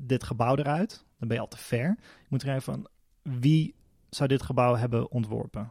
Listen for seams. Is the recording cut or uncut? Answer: uncut